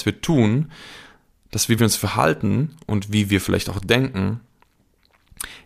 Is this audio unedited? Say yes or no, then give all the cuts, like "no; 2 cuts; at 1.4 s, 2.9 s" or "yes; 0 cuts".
yes; 0 cuts